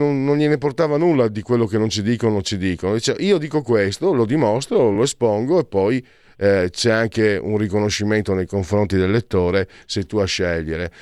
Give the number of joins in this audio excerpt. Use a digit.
0